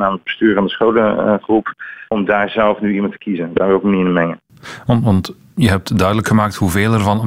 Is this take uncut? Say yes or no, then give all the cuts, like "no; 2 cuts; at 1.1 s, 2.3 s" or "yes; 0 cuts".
yes; 0 cuts